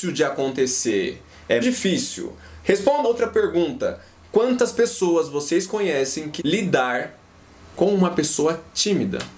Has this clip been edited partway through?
yes; 3 cuts; at 1.6 s, 3.0 s, 6.4 s

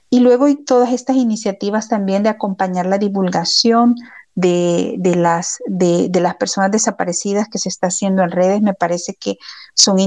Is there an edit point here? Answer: no; 0 cuts

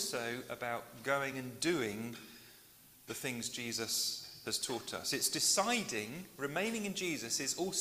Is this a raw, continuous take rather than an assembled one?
yes; 0 cuts

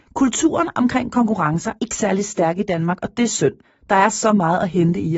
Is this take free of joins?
no; 2 cuts; at 1.8 s, 3.6 s

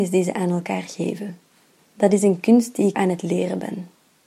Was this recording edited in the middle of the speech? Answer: yes; 2 cuts; at 1.8 s, 2.9 s

